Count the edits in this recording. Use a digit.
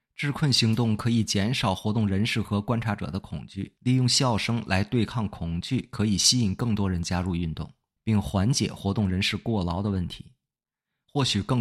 1